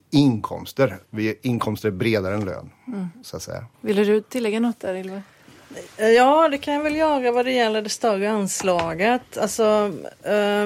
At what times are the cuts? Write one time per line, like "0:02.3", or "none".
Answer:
0:01.0
0:03.7